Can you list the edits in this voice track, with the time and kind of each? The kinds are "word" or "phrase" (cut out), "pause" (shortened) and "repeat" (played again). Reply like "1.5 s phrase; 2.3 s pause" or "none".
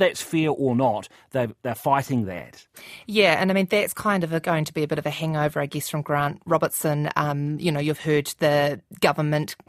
none